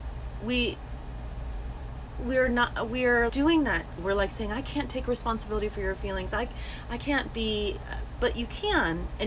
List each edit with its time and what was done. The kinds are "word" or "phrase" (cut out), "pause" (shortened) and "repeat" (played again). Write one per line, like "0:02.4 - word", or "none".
0:03.3 - word
0:04.0 - word

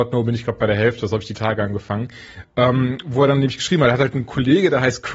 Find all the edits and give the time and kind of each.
none

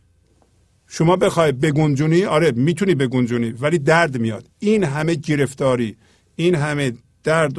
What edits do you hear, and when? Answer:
none

